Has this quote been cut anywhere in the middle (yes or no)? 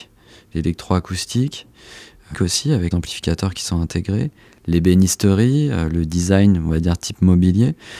yes